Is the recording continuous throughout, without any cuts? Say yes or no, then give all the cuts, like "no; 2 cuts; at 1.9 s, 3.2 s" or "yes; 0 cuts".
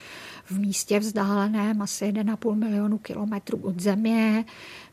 yes; 0 cuts